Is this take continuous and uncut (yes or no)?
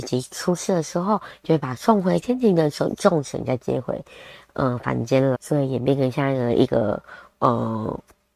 no